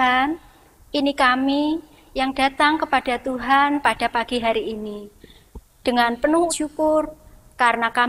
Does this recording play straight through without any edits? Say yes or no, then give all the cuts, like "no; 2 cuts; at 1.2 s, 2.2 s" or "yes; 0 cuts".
no; 1 cut; at 6.5 s